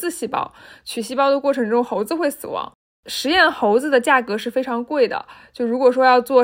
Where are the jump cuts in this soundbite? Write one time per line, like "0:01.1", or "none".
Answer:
none